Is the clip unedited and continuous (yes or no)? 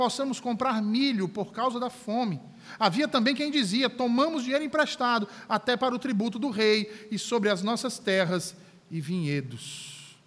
yes